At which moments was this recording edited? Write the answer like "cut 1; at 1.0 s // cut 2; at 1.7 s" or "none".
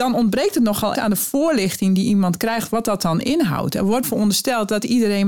cut 1; at 0.9 s // cut 2; at 4.0 s